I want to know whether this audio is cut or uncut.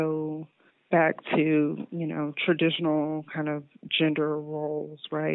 uncut